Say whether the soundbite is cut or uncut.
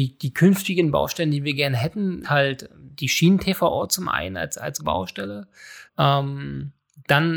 cut